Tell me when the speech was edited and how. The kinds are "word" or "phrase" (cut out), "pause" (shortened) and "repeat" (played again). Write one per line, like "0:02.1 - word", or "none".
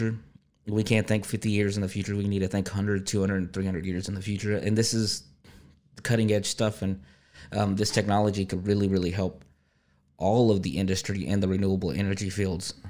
none